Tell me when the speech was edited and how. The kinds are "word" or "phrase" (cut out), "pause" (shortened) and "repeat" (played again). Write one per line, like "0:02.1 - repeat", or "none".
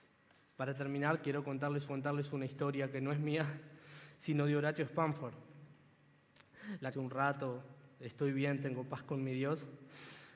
0:01.9 - repeat
0:06.9 - phrase